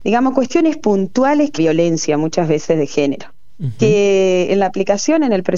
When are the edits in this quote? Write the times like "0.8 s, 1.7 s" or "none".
1.6 s